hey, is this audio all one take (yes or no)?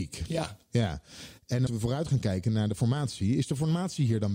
no